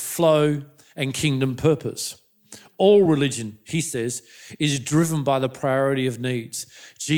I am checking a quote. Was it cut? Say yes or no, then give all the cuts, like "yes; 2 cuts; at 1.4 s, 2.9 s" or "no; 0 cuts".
no; 0 cuts